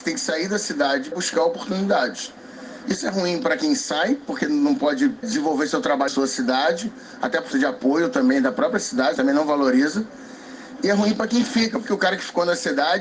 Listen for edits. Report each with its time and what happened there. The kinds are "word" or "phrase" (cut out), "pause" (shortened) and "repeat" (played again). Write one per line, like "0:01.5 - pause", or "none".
0:01.1 - word
0:05.2 - word
0:06.1 - word
0:07.5 - word
0:09.1 - word
0:11.9 - word